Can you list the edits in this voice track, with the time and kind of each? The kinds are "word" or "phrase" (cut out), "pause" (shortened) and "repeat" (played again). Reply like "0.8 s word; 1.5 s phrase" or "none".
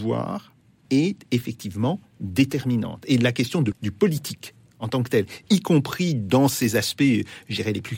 3.7 s word